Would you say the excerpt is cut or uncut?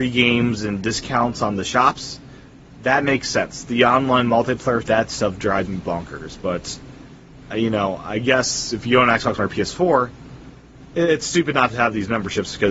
cut